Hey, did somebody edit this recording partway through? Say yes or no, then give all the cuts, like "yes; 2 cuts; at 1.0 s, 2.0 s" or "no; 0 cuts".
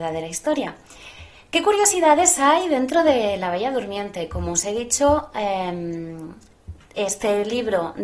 no; 0 cuts